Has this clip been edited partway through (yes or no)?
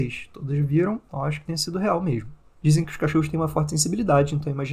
no